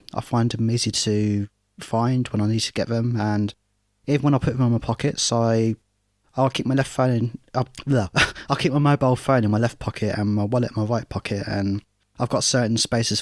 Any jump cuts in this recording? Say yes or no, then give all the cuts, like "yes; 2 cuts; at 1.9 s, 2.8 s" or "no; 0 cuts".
no; 0 cuts